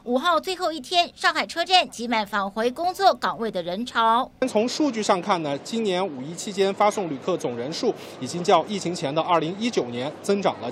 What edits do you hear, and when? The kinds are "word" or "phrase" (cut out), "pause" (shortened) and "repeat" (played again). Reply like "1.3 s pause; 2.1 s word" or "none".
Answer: 4.4 s pause

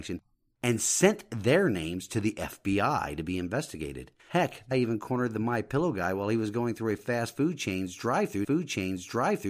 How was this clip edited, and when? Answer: 4.2 s pause; 4.7 s word; 8.4 s repeat

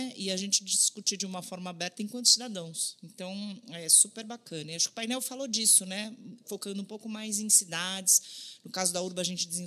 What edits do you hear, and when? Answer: none

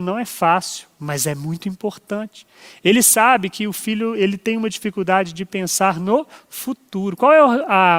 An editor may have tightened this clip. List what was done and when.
none

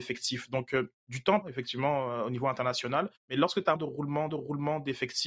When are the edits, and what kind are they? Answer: 1.0 s pause; 1.4 s phrase; 3.2 s pause; 3.8 s word; 4.3 s repeat

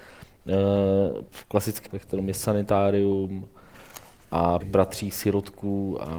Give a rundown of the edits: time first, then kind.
1.3 s word; 1.9 s word; 4.6 s word

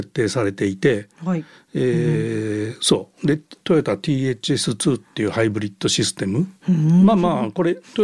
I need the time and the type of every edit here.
none

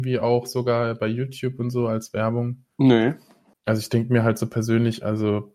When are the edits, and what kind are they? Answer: 2.7 s pause

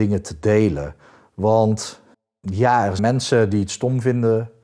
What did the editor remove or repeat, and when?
2.1 s pause; 3.0 s word

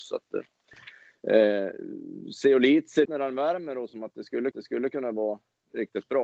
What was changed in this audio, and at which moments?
3.0 s word; 3.9 s word; 4.5 s repeat

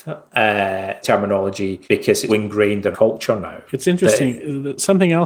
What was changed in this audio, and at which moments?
1.0 s word; 1.8 s pause; 2.3 s word; 2.9 s word; 3.7 s pause

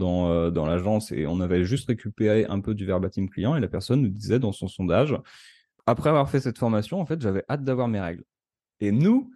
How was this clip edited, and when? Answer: none

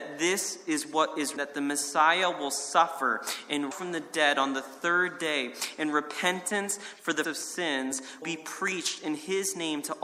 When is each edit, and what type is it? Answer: 1.4 s word; 3.7 s word; 7.2 s word; 8.2 s word

